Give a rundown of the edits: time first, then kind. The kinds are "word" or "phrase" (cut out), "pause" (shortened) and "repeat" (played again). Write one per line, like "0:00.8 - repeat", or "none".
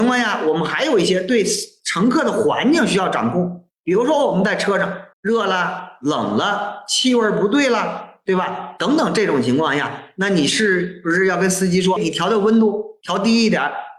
0:05.1 - pause
0:12.0 - word